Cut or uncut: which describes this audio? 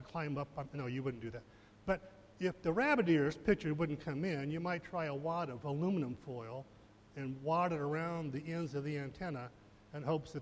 uncut